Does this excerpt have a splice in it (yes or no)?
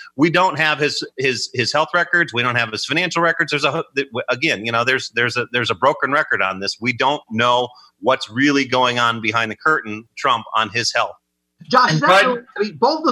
yes